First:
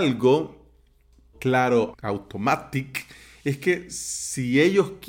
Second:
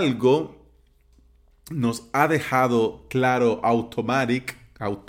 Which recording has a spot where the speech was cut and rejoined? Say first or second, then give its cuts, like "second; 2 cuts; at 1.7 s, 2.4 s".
first; 2 cuts; at 1.3 s, 1.9 s